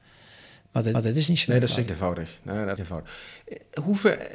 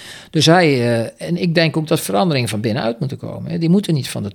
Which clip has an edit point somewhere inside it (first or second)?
first